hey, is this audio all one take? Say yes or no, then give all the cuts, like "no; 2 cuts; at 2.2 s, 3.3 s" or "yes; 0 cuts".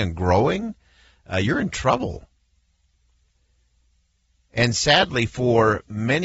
yes; 0 cuts